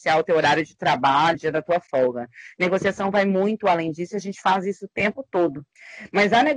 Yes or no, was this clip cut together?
yes